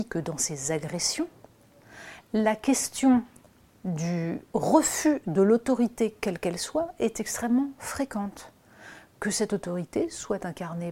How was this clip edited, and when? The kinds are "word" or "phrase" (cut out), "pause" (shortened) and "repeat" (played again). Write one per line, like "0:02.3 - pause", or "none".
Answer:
none